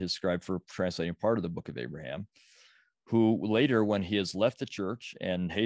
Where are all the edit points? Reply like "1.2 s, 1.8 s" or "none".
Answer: none